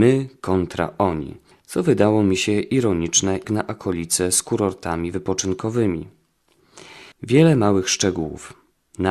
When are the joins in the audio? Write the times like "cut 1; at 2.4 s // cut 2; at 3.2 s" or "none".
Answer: cut 1; at 1.5 s // cut 2; at 3.4 s // cut 3; at 7.1 s